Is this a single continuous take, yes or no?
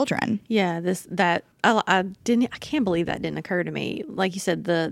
no